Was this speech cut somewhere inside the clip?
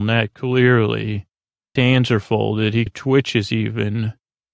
yes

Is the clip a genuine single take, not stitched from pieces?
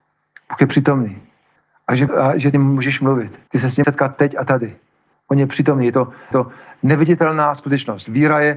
no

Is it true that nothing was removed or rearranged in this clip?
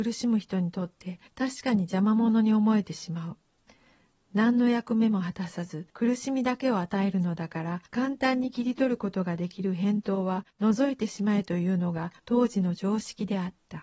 no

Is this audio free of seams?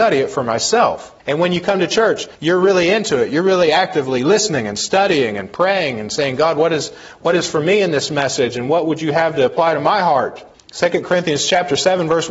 no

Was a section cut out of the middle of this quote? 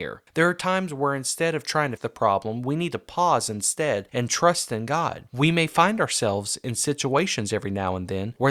yes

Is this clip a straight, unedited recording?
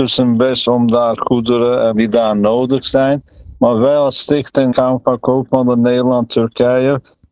no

